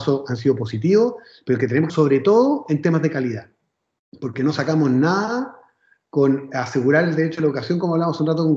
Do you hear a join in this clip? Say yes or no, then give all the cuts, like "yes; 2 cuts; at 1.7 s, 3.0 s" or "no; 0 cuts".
yes; 1 cut; at 1.9 s